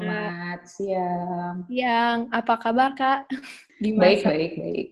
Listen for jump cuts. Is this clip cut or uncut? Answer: uncut